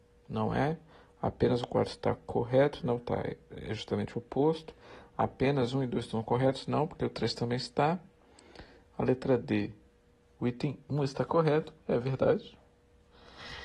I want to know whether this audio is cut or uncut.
uncut